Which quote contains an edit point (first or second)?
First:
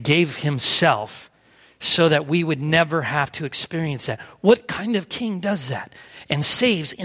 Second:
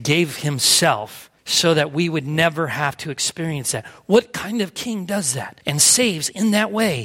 second